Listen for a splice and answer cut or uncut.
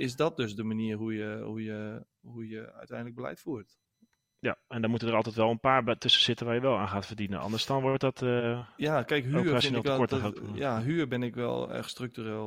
uncut